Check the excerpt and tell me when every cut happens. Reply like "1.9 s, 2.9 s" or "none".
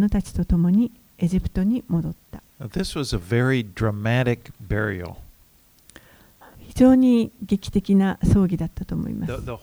2.5 s